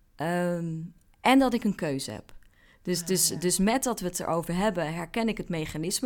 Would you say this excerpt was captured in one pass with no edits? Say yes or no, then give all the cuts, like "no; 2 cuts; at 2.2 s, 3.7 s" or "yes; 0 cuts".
yes; 0 cuts